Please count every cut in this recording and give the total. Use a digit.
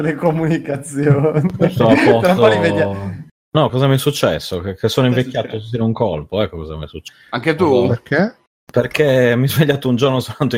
2